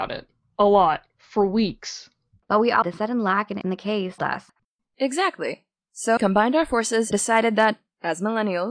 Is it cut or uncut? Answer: cut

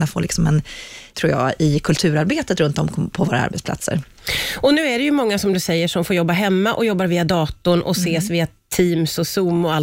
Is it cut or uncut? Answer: cut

